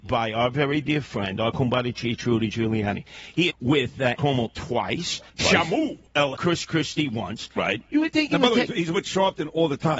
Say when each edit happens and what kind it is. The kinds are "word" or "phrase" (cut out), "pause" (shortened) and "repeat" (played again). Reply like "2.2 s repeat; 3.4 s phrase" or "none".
3.5 s phrase; 4.2 s phrase; 5.3 s pause; 6.3 s word